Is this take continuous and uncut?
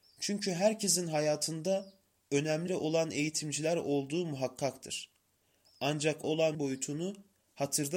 no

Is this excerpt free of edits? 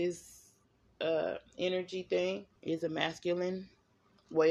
no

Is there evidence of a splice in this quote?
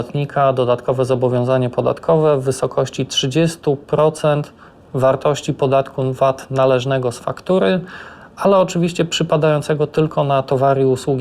no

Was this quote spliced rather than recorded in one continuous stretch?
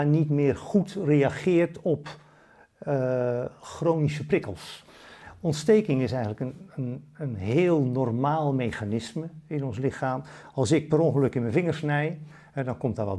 no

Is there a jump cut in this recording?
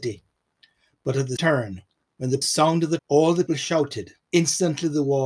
yes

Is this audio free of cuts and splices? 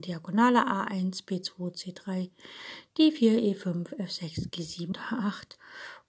no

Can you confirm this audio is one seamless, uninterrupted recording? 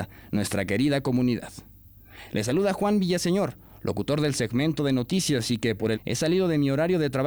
no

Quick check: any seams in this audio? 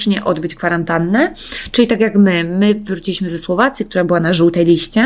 no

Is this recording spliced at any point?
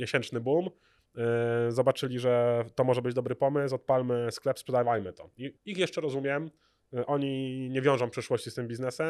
yes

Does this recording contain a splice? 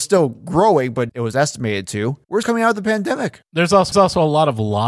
yes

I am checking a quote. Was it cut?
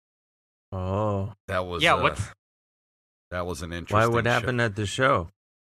no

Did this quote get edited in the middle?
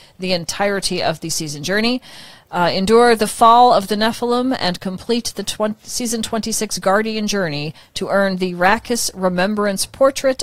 no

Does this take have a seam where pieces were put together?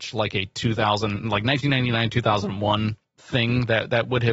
no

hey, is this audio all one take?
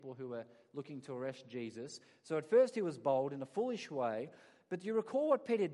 yes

